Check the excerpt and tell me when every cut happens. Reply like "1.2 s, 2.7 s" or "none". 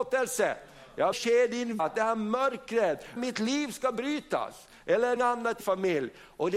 1.1 s, 1.8 s, 3.2 s, 5.2 s, 5.6 s